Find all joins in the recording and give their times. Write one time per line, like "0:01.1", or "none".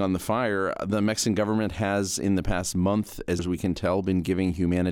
0:03.4